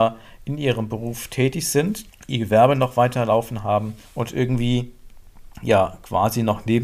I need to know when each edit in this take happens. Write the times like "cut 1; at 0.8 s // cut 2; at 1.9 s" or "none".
cut 1; at 2.1 s // cut 2; at 4.0 s // cut 3; at 5.5 s